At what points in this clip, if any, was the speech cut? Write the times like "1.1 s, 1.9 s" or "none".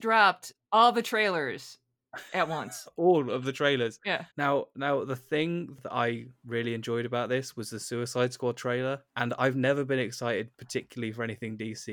4.3 s, 9.1 s